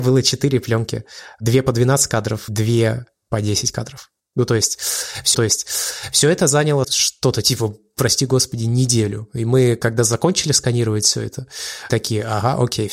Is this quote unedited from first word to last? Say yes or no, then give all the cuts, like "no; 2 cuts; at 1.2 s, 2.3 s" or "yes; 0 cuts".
no; 5 cuts; at 2.5 s, 4.2 s, 5.3 s, 6.8 s, 11.9 s